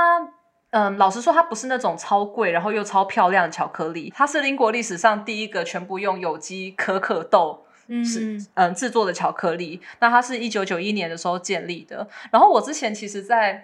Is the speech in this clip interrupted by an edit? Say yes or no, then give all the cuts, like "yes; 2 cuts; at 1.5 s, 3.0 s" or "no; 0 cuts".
no; 0 cuts